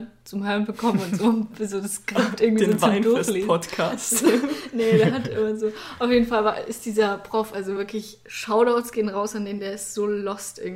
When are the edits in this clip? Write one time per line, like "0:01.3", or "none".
none

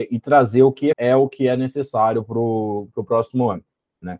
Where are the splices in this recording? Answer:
0:00.9

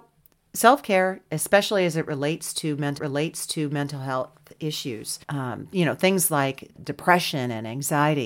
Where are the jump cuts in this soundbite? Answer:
0:03.0
0:05.2
0:06.8

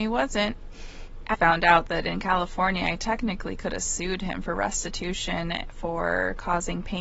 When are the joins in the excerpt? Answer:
0:01.3

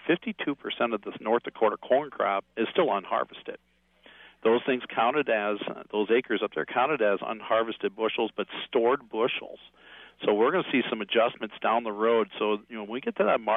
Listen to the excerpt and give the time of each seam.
none

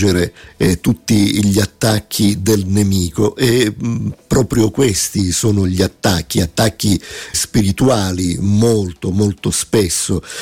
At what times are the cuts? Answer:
0:07.3

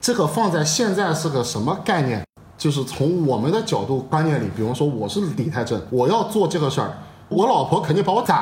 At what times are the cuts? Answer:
none

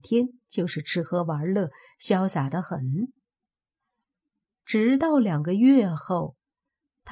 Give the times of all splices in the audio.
none

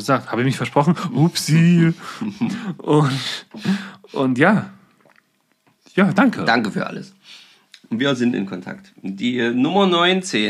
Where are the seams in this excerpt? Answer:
none

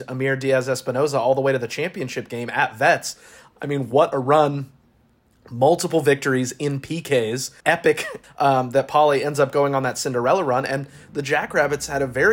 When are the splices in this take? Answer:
0:07.6
0:08.2

